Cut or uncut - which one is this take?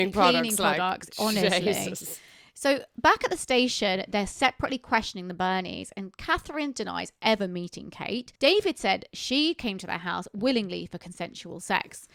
cut